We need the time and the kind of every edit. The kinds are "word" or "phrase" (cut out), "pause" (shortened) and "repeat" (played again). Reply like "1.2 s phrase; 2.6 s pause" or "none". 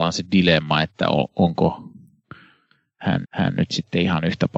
3.2 s repeat